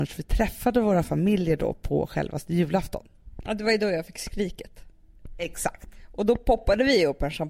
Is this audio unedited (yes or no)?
yes